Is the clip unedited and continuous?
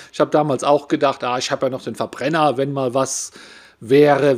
yes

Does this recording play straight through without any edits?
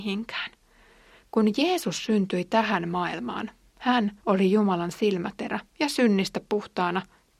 no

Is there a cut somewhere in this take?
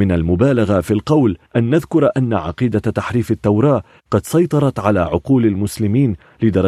yes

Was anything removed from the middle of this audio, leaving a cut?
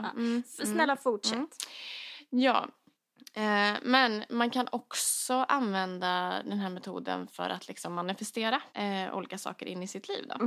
yes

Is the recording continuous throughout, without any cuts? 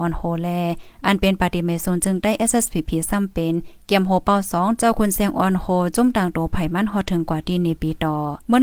yes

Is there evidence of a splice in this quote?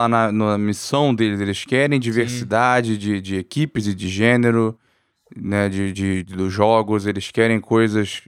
no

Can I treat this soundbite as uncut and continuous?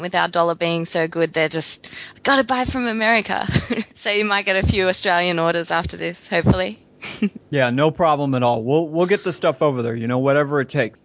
yes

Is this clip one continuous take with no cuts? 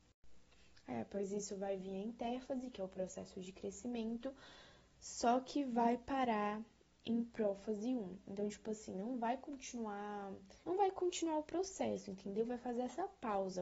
no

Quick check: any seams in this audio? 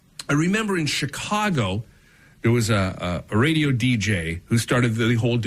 no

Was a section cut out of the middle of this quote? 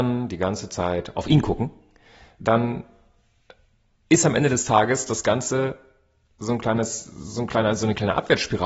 no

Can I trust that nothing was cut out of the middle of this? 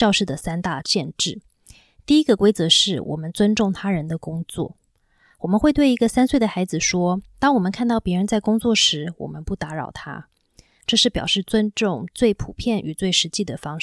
yes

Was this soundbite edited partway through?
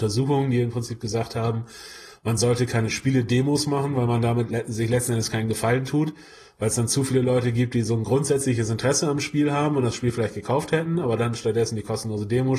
no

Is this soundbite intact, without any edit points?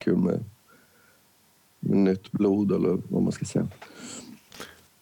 yes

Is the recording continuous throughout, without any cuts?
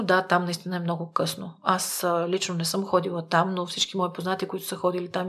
yes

